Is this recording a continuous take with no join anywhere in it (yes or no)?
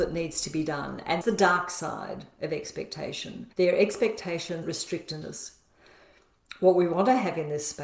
no